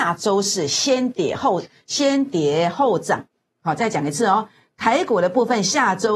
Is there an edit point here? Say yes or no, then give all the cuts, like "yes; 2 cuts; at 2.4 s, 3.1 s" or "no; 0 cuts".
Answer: no; 0 cuts